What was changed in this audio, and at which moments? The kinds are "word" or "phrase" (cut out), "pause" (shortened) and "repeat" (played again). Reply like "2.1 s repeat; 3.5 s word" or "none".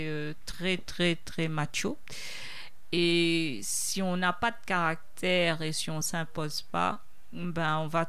none

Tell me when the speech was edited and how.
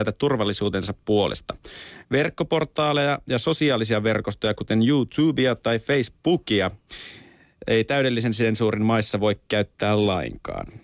none

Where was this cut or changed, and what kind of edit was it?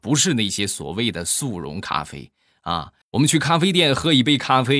3.0 s pause

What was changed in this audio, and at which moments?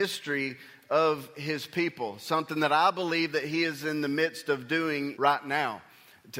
5.1 s word

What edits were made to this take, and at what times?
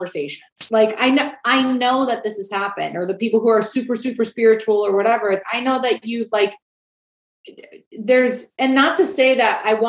5.4 s word

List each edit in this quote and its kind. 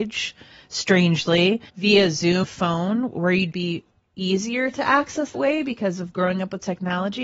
1.7 s pause; 2.4 s word; 3.5 s phrase; 5.3 s word

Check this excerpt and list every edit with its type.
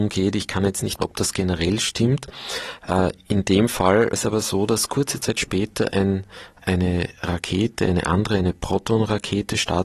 1.0 s word; 4.1 s word; 6.6 s word

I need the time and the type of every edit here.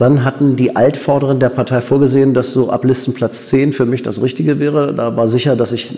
none

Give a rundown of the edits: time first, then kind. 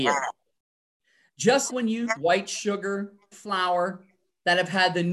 1.7 s word; 2.2 s word; 3.3 s phrase

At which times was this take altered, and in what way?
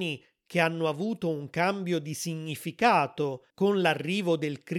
3.5 s pause

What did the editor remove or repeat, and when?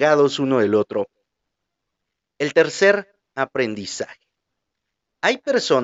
none

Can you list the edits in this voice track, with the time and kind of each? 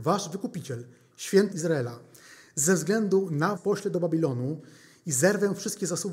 1.5 s word; 3.6 s word

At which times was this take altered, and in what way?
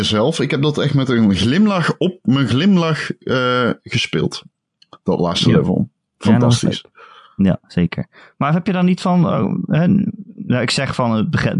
none

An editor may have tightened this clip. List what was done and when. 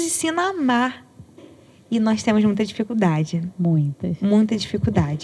none

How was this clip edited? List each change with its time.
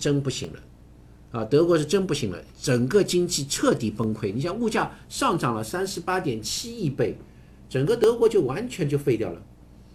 2.5 s pause

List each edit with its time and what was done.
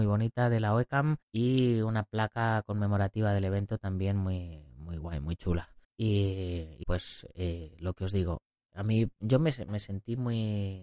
1.2 s pause; 5.8 s pause; 6.8 s word; 8.7 s word

